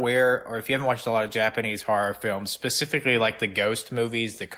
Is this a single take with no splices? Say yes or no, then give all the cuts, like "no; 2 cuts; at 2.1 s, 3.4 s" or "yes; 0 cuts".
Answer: yes; 0 cuts